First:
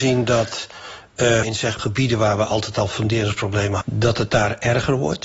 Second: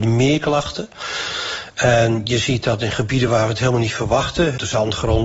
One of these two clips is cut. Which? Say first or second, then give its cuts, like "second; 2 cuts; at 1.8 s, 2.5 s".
first; 3 cuts; at 1.4 s, 1.8 s, 3.8 s